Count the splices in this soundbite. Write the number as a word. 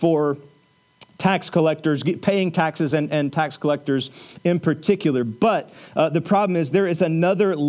zero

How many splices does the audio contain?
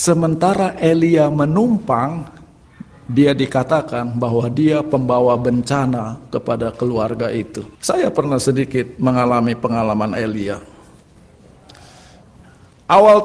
one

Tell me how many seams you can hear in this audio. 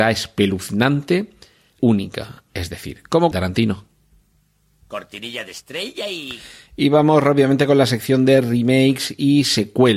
two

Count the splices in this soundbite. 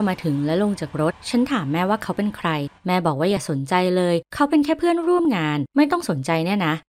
one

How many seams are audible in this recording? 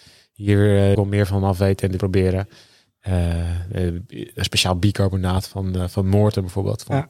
two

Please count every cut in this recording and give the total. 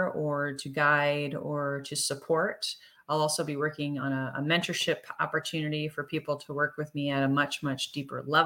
zero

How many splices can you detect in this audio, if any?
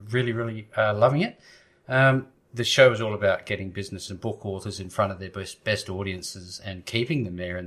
two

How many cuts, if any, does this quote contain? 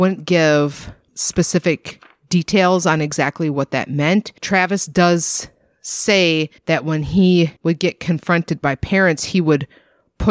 three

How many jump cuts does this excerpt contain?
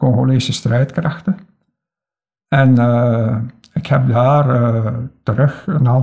zero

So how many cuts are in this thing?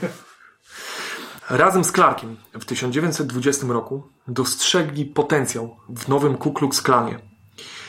one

